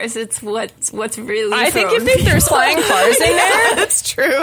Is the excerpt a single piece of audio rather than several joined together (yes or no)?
no